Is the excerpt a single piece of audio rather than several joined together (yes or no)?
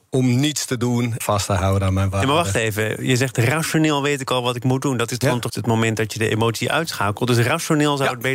no